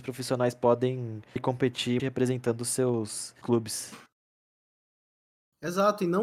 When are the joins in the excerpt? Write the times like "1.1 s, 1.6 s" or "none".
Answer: 1.4 s, 2.0 s, 3.4 s

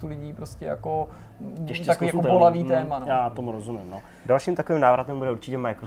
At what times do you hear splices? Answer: none

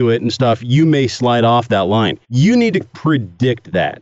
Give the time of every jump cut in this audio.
1.1 s, 2.2 s, 2.8 s

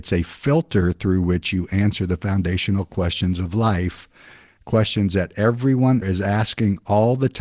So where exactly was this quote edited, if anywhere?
6.0 s

